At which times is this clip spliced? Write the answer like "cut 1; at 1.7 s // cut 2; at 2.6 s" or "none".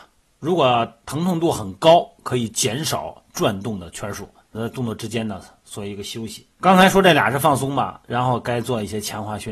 cut 1; at 4.5 s // cut 2; at 6.5 s